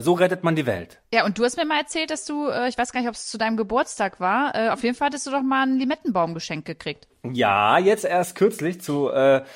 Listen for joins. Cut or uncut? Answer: uncut